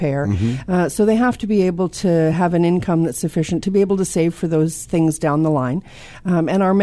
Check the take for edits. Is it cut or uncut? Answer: uncut